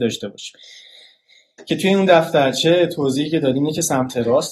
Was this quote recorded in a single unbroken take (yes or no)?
yes